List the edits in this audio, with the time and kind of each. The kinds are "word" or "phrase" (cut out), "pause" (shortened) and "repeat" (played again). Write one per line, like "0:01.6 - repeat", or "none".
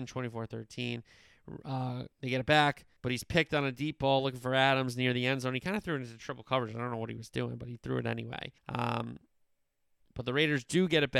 0:02.1 - pause
0:03.0 - pause
0:08.6 - pause